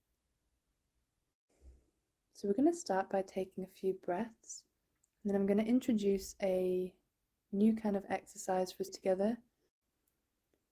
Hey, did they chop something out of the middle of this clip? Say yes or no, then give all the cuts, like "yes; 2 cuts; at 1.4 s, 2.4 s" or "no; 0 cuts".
yes; 2 cuts; at 4.9 s, 8.9 s